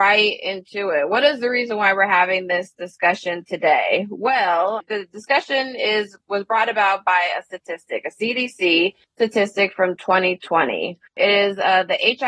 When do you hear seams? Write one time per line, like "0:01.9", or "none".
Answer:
0:09.0
0:11.1

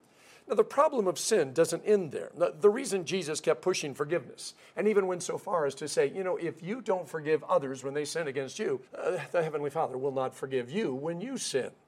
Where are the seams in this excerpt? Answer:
0:08.9

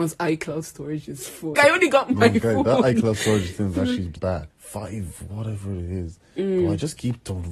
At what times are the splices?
0:01.5
0:04.2
0:04.5

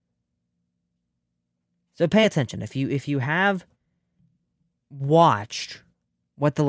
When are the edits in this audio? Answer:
none

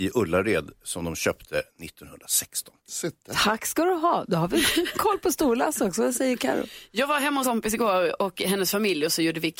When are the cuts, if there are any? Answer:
0:02.8
0:07.4

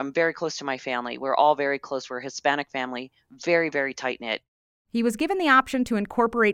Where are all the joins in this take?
none

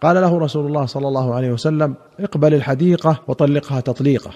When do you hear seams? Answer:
0:02.1
0:03.2

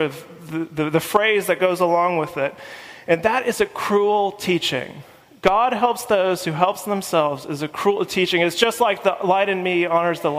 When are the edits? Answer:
none

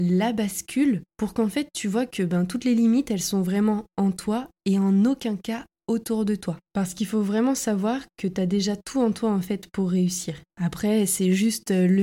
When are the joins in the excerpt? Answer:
0:01.1
0:10.5

